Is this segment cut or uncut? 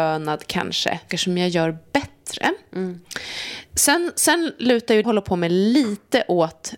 cut